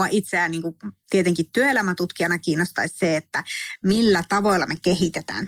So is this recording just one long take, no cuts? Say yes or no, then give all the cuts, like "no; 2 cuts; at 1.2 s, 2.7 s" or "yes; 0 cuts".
yes; 0 cuts